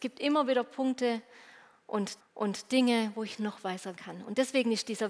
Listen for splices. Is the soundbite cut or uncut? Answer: cut